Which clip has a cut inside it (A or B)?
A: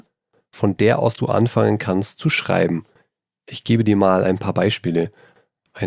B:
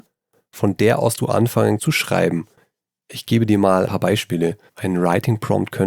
B